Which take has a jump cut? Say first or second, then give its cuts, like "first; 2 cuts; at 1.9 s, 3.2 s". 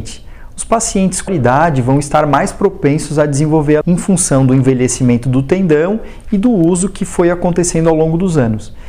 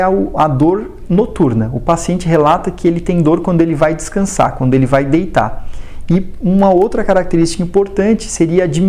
first; 2 cuts; at 1.3 s, 3.8 s